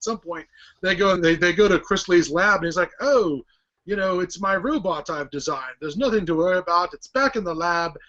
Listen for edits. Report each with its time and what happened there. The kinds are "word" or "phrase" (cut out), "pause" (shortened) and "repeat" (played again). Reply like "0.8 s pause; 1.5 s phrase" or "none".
1.2 s word